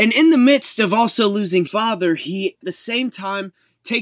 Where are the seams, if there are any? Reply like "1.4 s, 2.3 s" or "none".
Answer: 1.7 s, 2.6 s

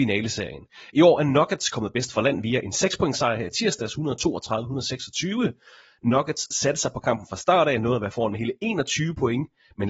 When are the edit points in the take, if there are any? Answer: none

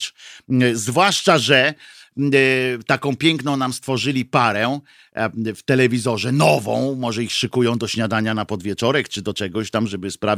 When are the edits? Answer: none

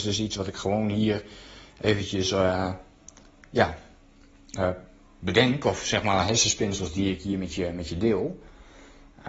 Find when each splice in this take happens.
none

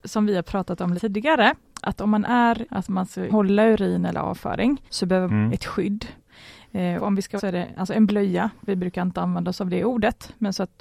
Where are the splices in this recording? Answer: 1.0 s, 2.7 s, 3.3 s, 4.9 s, 5.3 s, 7.0 s, 7.4 s

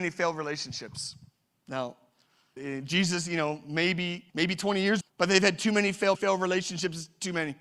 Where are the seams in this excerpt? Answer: 2.6 s, 4.3 s, 5.0 s, 6.1 s

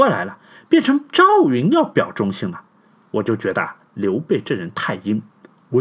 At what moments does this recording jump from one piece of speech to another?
none

